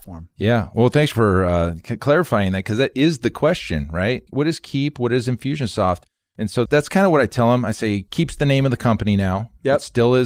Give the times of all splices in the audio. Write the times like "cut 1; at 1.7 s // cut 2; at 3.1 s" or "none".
none